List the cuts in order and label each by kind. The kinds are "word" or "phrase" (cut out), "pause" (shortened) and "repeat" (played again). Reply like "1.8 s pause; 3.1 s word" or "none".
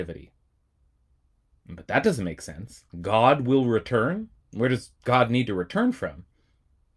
2.9 s pause; 4.4 s pause